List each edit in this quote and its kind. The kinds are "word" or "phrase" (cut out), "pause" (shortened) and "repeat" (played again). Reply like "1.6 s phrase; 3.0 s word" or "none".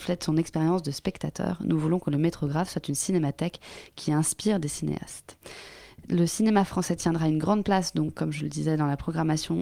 none